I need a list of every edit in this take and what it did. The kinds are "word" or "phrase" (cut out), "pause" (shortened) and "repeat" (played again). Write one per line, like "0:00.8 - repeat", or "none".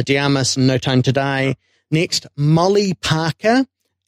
none